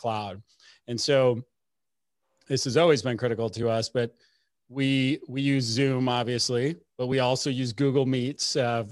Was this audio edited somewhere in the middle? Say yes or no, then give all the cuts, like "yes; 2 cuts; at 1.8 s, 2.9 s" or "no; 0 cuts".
no; 0 cuts